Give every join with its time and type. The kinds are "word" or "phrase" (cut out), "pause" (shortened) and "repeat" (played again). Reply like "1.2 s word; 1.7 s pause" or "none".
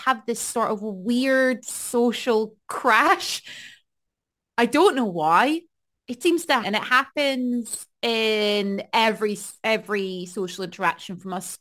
2.6 s pause; 6.2 s word; 6.6 s word